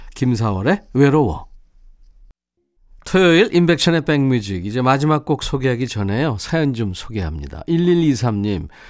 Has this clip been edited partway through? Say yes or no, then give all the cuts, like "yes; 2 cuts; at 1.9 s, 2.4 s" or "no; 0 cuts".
no; 0 cuts